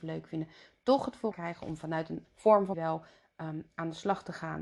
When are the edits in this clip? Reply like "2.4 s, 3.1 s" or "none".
1.3 s, 2.2 s, 2.7 s